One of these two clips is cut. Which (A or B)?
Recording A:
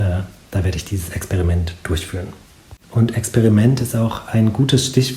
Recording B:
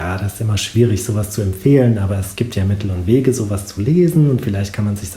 A